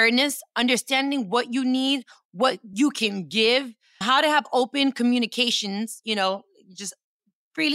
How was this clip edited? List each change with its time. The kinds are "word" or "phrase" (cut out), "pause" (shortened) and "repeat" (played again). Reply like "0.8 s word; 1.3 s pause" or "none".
4.0 s word